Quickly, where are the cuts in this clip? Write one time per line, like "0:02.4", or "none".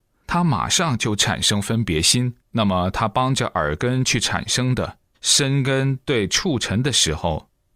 0:02.4
0:05.1